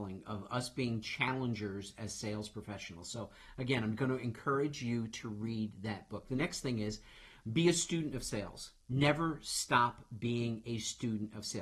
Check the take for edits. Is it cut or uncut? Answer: cut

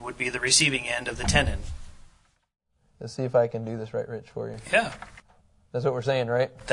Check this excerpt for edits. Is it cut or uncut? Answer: uncut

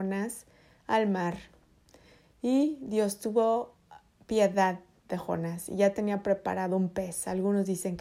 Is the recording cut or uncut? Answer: uncut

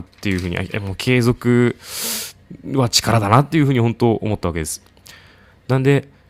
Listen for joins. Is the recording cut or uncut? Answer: uncut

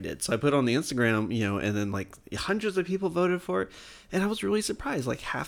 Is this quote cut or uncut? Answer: uncut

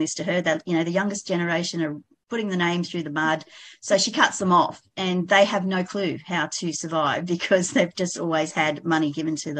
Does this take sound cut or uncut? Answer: uncut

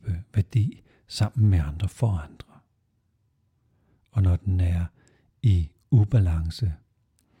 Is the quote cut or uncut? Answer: uncut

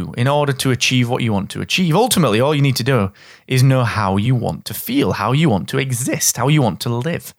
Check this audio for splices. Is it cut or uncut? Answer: uncut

